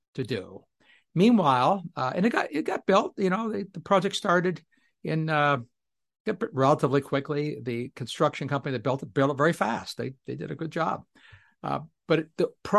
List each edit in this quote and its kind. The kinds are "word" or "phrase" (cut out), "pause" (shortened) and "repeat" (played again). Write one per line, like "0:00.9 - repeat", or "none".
none